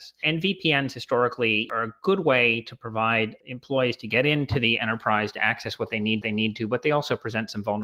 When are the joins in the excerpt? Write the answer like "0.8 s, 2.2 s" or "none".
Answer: 6.2 s